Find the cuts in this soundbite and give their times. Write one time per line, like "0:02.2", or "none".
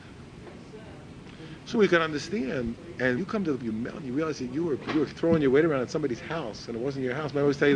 0:01.7
0:03.2
0:03.6